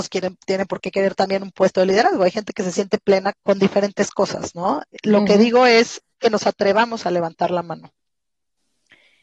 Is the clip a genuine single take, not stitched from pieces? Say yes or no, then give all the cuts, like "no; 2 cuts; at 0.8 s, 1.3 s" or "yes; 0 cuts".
no; 1 cut; at 3.3 s